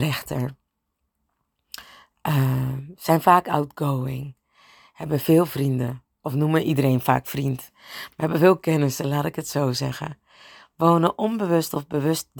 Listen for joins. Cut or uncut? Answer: uncut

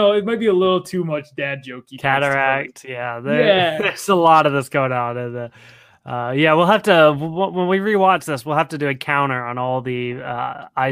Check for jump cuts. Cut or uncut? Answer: uncut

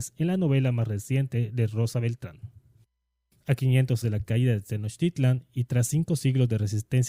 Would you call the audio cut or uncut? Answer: cut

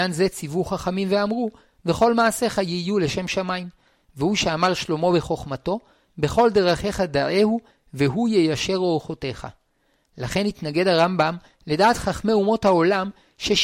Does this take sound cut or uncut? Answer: uncut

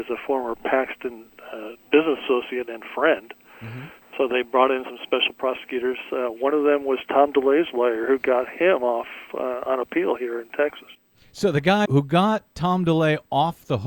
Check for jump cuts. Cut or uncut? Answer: cut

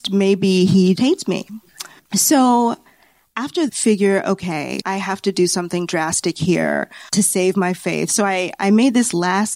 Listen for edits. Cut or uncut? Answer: cut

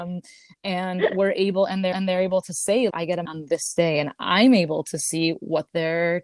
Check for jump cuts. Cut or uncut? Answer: cut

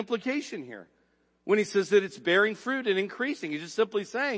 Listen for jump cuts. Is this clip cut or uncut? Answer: uncut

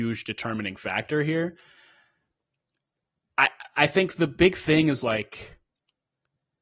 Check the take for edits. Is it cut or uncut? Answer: uncut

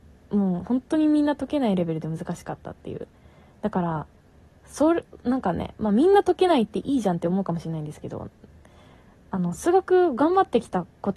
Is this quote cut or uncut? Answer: uncut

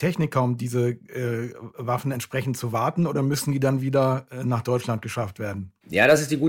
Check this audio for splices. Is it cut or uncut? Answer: uncut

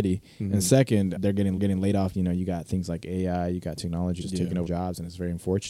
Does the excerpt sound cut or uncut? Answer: cut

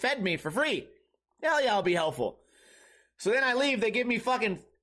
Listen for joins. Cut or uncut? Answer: uncut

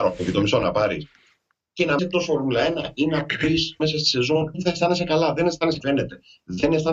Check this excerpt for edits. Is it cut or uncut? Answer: cut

